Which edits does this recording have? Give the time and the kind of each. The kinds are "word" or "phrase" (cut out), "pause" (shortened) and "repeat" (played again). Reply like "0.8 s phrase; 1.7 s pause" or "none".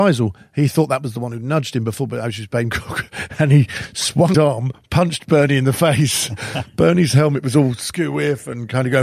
4.3 s word